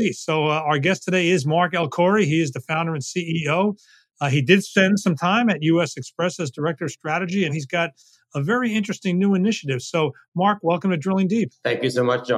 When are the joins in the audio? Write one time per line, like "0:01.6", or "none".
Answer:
0:07.5

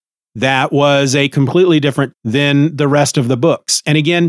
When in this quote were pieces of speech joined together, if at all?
0:02.1

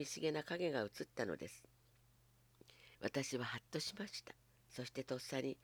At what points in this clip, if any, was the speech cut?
0:02.9
0:04.5

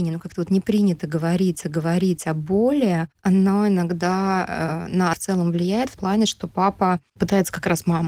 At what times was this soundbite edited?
0:01.6
0:03.1
0:05.1
0:06.0
0:07.1

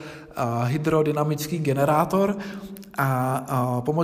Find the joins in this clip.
none

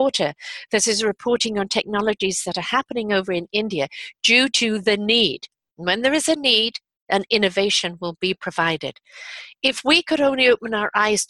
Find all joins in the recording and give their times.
none

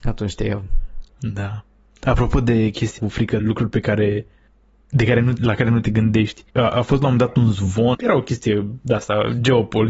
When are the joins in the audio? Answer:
0:01.1
0:03.0
0:03.4
0:04.5
0:05.4
0:06.5
0:07.9

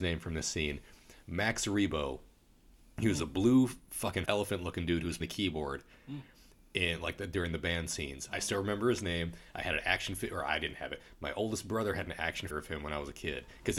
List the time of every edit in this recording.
0:04.3
0:05.2
0:12.5

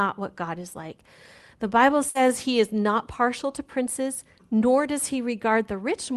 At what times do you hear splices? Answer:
none

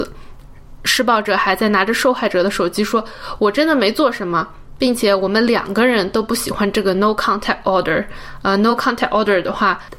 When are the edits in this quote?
none

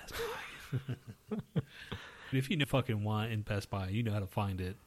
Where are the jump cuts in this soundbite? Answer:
0:02.3
0:02.6

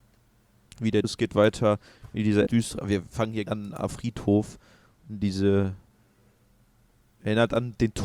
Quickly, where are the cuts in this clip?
0:01.0
0:02.5
0:03.5
0:03.9

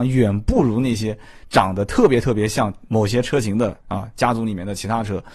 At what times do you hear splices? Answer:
0:03.8

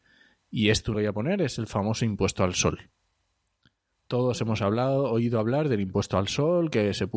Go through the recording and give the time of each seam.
0:00.9

